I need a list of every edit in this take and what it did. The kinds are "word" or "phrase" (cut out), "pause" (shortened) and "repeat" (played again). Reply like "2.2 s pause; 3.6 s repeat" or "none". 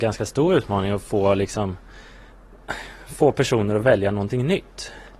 none